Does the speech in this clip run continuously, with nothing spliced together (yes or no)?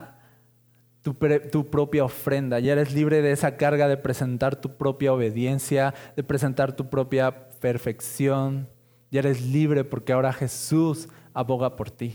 yes